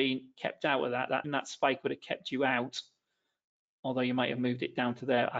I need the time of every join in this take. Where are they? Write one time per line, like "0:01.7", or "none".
0:01.2